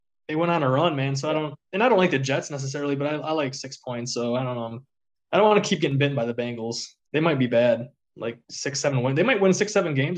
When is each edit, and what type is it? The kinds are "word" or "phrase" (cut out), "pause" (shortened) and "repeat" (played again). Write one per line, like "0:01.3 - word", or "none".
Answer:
0:01.6 - pause
0:05.2 - pause
0:07.0 - pause
0:08.4 - pause